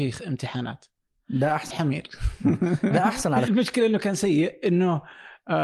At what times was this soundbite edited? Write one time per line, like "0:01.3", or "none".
0:01.7
0:02.9
0:03.5